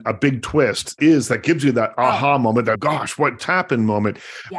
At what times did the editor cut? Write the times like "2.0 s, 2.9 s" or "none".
1.0 s, 2.8 s, 3.4 s